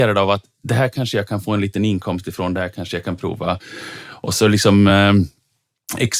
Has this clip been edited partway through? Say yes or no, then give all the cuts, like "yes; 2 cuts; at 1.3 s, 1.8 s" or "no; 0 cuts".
no; 0 cuts